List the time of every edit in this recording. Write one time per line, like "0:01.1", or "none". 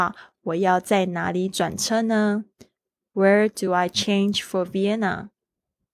none